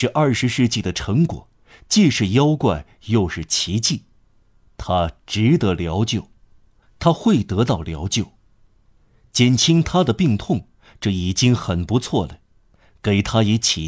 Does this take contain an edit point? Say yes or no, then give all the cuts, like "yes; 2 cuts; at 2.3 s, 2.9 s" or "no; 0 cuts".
no; 0 cuts